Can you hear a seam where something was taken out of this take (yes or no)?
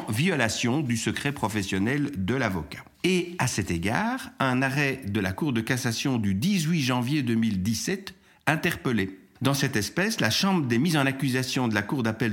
no